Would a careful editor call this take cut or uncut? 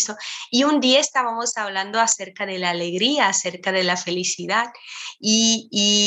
uncut